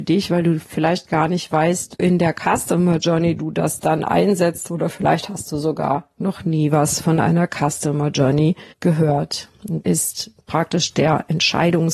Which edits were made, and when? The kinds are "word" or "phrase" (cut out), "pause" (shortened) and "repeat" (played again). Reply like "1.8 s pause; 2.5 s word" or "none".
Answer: 2.0 s word; 8.7 s pause; 9.8 s word